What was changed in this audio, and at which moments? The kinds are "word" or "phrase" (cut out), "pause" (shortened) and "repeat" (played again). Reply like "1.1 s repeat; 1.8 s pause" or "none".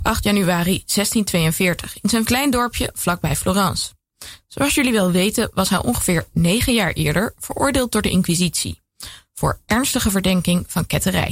2.3 s phrase